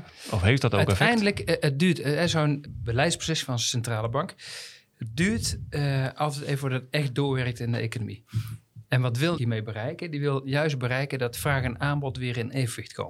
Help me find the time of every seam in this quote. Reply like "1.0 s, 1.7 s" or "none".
2.7 s, 9.4 s

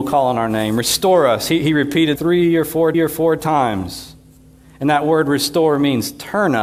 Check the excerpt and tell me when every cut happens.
2.2 s, 2.9 s

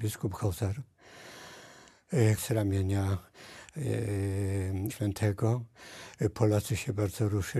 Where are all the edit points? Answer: 2.4 s, 4.9 s

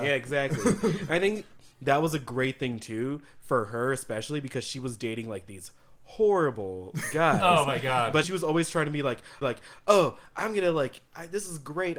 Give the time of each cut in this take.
8.2 s, 9.4 s

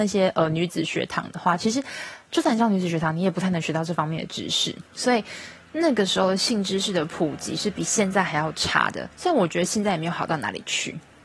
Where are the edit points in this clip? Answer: 4.9 s, 9.1 s

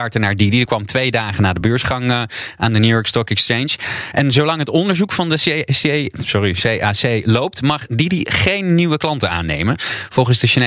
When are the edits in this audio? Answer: none

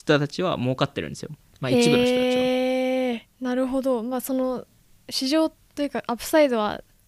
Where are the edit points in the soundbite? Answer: 1.5 s, 3.3 s

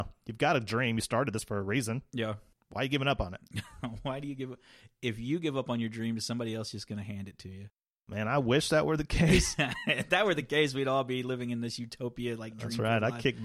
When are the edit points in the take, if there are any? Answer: none

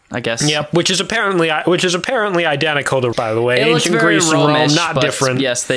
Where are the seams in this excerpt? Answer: 3.1 s

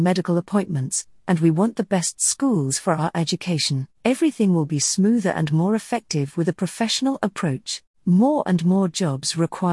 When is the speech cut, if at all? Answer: 3.9 s, 7.9 s

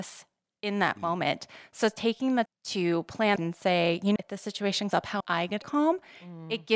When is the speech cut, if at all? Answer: 2.5 s, 3.4 s, 4.2 s, 4.9 s, 5.2 s, 5.6 s

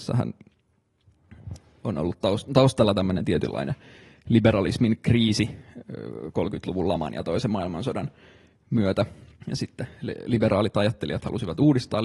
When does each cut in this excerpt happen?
9.3 s

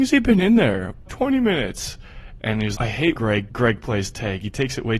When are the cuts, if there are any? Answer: 1.1 s, 2.7 s, 3.1 s, 3.5 s

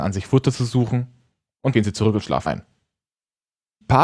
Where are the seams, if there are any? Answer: 1.7 s, 2.5 s

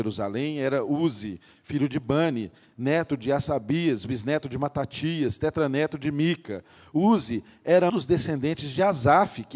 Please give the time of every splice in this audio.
7.9 s

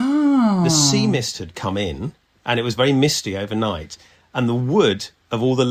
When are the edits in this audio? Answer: none

